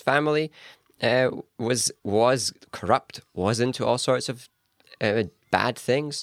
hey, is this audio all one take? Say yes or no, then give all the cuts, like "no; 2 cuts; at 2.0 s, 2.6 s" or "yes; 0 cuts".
yes; 0 cuts